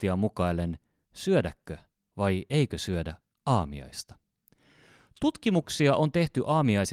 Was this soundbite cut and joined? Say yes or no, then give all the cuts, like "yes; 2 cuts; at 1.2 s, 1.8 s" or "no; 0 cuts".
no; 0 cuts